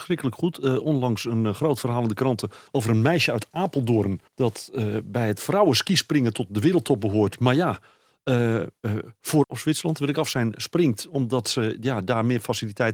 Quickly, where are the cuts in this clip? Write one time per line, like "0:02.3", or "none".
0:02.7
0:04.3
0:09.4